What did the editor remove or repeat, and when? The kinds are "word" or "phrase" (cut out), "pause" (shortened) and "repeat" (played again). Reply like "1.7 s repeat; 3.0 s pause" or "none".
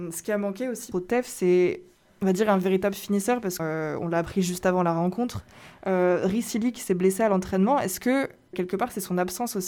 0.9 s word; 3.6 s word; 8.5 s word